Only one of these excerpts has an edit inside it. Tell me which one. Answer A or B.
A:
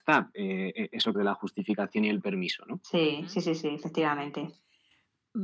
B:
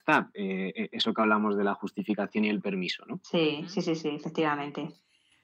A